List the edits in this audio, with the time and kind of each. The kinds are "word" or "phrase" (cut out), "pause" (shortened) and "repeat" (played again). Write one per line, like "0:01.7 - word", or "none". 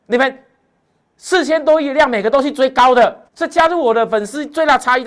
0:03.3 - pause